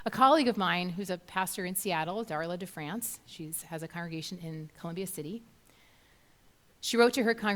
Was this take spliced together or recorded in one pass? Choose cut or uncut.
uncut